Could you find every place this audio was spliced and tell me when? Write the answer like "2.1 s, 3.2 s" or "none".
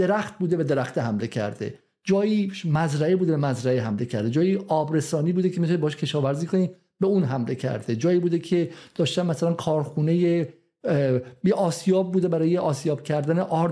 none